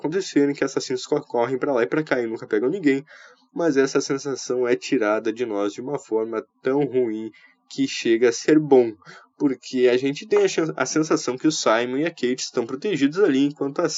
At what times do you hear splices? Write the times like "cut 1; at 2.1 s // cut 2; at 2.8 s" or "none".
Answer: none